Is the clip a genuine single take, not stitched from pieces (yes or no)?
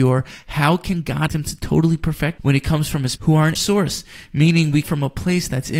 no